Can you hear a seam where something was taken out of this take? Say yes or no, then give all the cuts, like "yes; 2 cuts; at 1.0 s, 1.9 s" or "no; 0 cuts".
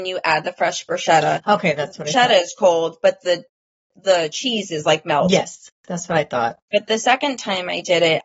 no; 0 cuts